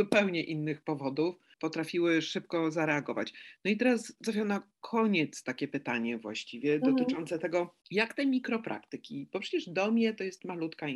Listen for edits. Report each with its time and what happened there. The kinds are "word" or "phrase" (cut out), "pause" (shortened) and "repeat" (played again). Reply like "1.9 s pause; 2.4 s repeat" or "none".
none